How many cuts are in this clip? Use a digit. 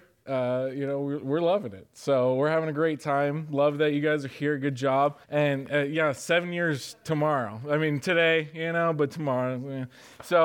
1